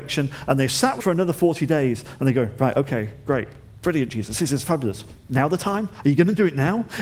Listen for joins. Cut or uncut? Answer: cut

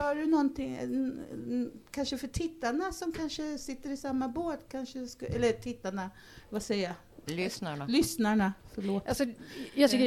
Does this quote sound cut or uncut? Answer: uncut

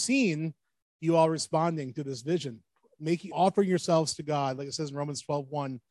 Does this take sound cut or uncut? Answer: cut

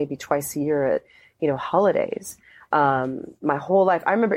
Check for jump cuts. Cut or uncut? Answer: uncut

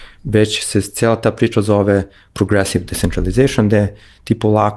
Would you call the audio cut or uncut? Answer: uncut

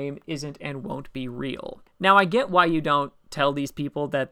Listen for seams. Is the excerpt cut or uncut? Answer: cut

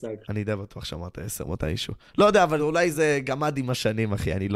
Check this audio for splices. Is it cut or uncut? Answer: uncut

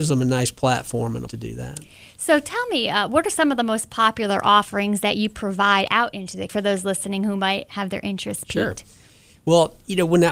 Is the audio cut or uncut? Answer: cut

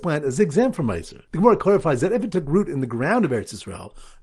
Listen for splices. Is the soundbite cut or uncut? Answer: uncut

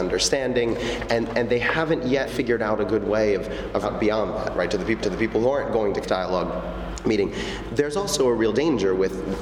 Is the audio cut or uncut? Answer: cut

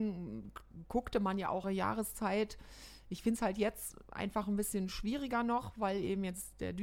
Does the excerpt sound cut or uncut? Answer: cut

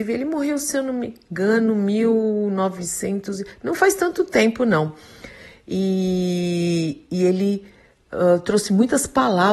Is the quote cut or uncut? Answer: uncut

